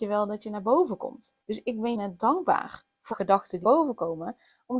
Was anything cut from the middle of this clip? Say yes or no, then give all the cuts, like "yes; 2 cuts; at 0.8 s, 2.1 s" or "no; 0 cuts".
yes; 4 cuts; at 1.4 s, 1.9 s, 3.1 s, 3.6 s